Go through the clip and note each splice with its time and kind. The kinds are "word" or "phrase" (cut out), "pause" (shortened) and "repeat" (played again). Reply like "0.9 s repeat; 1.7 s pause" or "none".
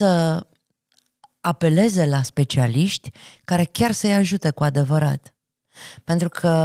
none

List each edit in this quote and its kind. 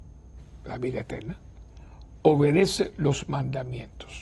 none

